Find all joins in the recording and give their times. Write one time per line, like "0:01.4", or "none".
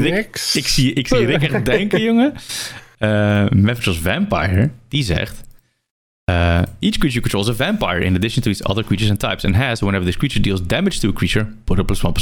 none